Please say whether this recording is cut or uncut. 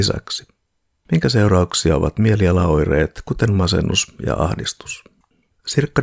uncut